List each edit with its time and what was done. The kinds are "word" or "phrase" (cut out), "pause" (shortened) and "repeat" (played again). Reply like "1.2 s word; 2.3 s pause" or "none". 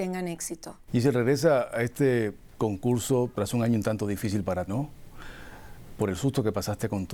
4.7 s word